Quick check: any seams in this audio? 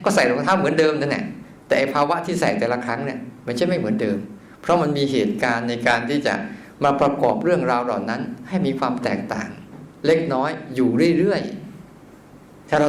no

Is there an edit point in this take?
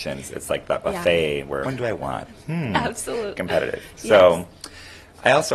yes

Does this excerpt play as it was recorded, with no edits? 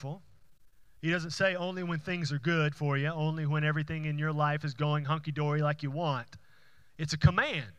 yes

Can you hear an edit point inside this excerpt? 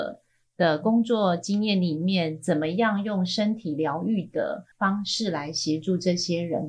yes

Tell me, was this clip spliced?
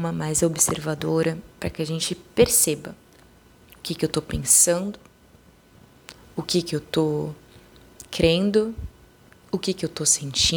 no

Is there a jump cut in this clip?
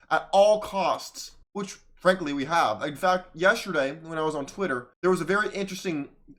yes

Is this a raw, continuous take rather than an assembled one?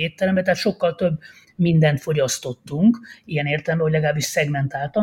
yes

